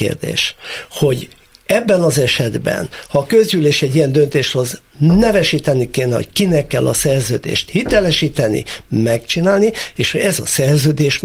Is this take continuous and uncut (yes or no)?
yes